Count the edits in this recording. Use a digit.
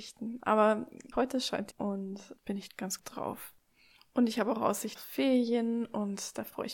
6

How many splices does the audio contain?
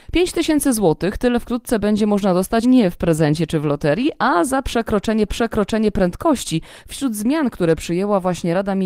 2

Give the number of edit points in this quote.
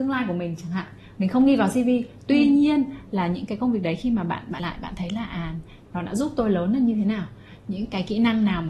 1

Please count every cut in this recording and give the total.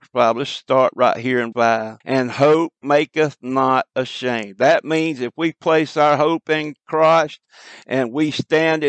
2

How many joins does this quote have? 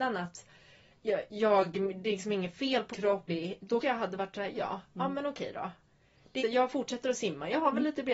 5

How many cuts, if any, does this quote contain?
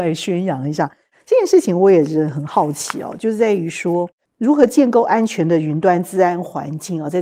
1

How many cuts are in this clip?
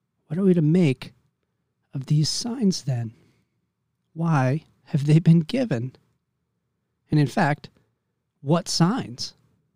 0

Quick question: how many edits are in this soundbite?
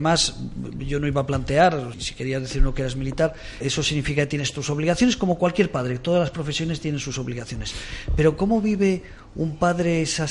2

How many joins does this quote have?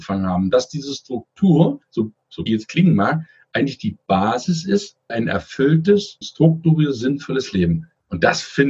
4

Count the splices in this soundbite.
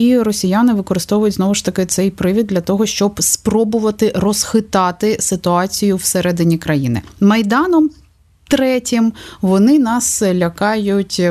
0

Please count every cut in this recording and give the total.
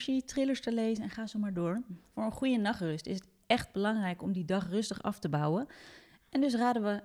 0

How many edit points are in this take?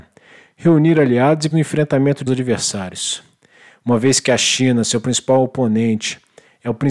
2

